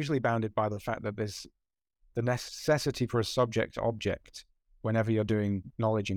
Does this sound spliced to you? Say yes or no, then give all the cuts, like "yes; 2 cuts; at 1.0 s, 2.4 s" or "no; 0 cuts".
no; 0 cuts